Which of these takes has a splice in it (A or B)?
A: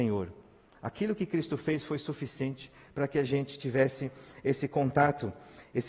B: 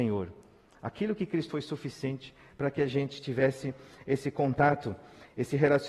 B